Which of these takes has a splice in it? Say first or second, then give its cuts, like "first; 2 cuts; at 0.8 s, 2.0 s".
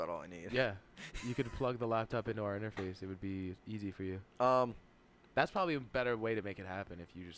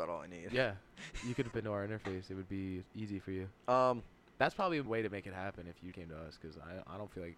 second; 4 cuts; at 1.5 s, 4.1 s, 4.9 s, 5.9 s